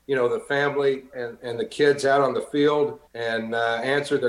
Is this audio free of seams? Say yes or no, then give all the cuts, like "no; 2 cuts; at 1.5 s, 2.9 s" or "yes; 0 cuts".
no; 2 cuts; at 1.1 s, 3.1 s